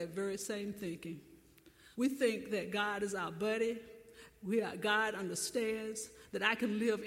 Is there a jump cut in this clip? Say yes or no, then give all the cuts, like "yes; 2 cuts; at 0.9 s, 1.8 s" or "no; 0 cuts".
yes; 1 cut; at 1.9 s